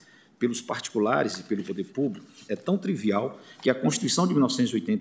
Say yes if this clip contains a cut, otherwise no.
no